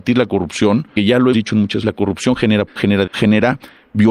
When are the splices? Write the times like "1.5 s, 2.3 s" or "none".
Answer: 1.0 s, 1.3 s, 1.8 s, 2.7 s, 3.1 s